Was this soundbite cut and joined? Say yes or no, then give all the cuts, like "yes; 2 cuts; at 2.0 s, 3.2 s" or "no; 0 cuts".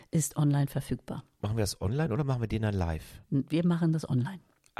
yes; 1 cut; at 3.2 s